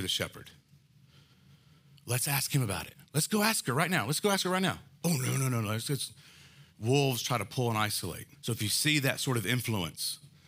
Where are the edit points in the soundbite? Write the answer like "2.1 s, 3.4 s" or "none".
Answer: 6.7 s, 8.3 s